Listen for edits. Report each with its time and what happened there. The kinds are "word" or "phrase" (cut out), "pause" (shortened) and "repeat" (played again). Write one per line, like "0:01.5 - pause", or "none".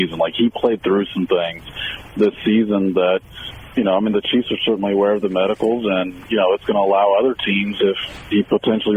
none

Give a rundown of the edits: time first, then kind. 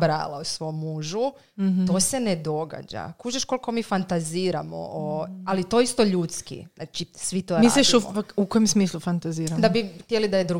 none

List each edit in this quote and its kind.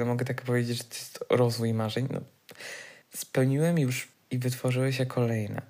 0:03.0 - pause
0:04.1 - word

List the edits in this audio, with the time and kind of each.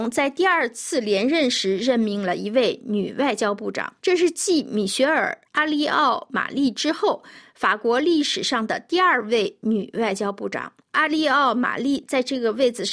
0:04.0 - pause
0:10.8 - pause

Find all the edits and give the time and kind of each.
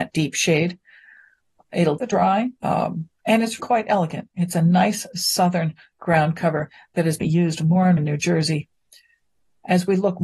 0:02.0 - word
0:02.6 - pause
0:03.6 - word
0:07.2 - phrase
0:08.0 - word

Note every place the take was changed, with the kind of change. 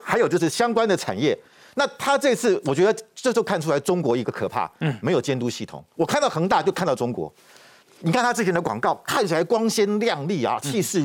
none

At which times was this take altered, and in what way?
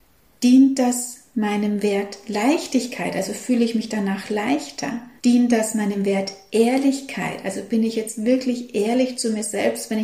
0:05.2 - pause

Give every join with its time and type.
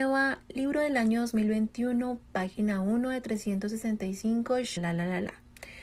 0:04.8 - word

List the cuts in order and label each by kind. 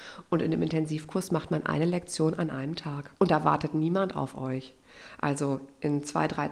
0:03.2 - pause

